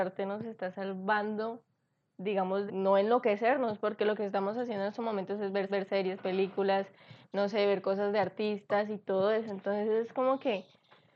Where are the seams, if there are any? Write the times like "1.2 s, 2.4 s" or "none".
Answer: 2.7 s, 5.7 s